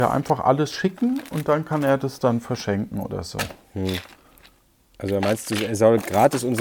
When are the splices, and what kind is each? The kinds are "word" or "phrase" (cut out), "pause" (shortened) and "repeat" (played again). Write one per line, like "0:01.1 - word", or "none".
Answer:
none